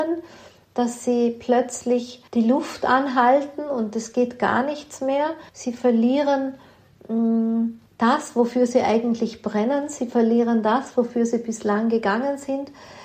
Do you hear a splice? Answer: yes; 3 cuts; at 2.3 s, 5.5 s, 7.9 s

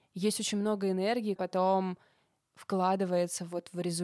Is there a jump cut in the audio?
yes; 1 cut; at 1.4 s

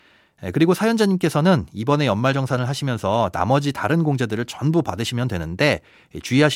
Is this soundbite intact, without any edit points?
yes; 0 cuts

